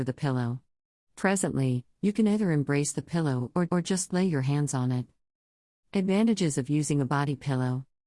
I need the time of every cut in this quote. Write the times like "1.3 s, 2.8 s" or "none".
3.7 s